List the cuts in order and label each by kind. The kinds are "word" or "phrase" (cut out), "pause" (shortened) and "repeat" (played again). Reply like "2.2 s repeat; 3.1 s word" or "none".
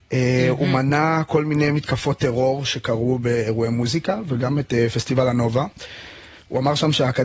none